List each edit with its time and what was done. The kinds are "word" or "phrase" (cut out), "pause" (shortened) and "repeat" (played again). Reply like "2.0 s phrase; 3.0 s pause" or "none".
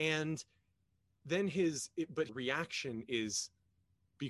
2.3 s phrase